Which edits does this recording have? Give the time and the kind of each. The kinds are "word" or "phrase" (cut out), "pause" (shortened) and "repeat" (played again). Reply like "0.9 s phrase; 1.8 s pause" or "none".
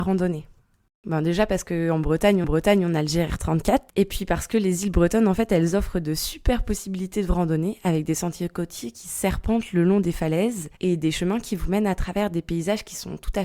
2.4 s repeat